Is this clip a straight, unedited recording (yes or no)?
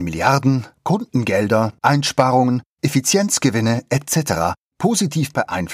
yes